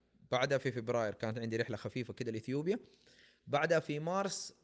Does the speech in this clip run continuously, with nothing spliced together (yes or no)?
yes